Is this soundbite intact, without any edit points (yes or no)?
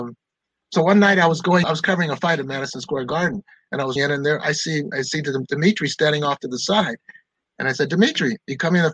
no